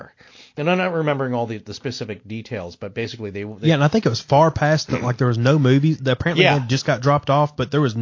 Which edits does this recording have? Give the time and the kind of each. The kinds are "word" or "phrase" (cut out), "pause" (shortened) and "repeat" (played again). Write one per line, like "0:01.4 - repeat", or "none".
none